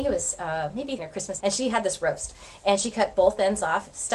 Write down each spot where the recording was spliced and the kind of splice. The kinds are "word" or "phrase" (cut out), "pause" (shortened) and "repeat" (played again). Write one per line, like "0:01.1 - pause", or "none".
0:01.0 - word
0:01.4 - word

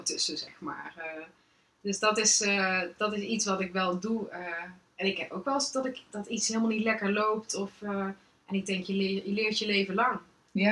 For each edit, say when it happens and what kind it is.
none

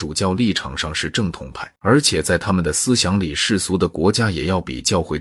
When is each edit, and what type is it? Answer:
0:01.8 - pause

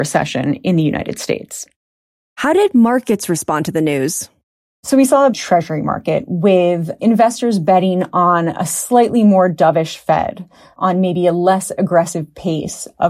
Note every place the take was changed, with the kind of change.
0:05.3 - phrase

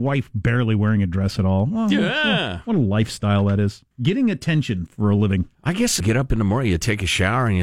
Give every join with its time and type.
0:03.9 - pause
0:04.9 - word
0:05.5 - pause
0:06.0 - phrase

